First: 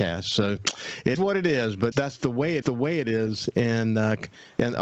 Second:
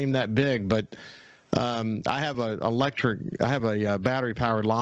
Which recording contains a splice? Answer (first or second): first